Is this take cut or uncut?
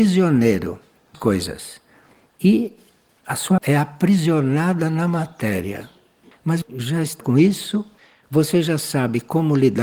cut